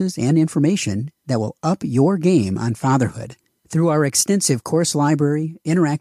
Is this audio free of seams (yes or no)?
yes